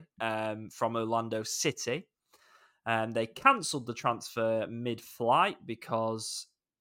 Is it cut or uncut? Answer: uncut